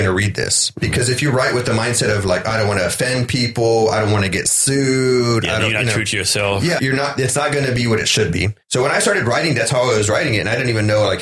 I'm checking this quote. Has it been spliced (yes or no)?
yes